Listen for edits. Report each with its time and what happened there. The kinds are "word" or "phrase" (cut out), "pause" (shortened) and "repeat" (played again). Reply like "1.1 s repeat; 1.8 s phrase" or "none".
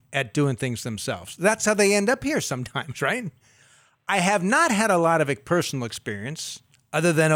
none